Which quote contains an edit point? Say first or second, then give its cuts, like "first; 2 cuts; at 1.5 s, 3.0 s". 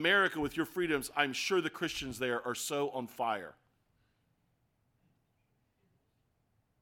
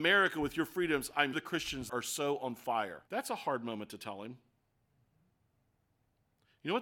second; 3 cuts; at 1.3 s, 1.9 s, 3.1 s